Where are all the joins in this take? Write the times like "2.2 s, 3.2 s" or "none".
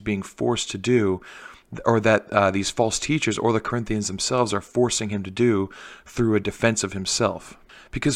none